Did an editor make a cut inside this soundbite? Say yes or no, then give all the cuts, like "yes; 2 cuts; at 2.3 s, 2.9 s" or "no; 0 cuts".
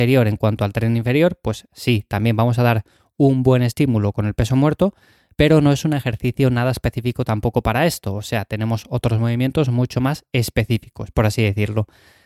no; 0 cuts